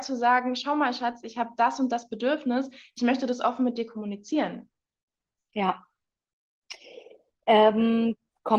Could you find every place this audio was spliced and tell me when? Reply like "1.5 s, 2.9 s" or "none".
none

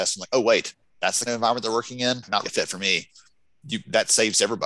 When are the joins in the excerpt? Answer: 1.3 s, 2.4 s

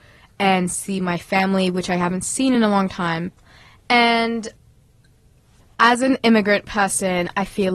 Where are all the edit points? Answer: none

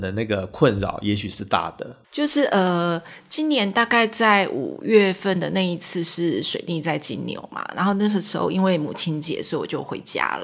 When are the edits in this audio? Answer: 2.0 s

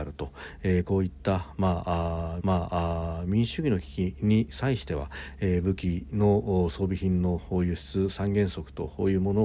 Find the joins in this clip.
2.4 s

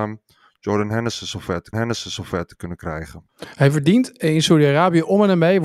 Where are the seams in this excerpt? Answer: 1.7 s, 3.3 s

